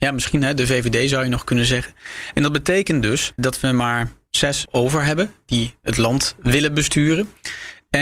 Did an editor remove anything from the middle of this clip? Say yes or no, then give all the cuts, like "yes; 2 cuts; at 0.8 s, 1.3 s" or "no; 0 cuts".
yes; 2 cuts; at 3.4 s, 4.7 s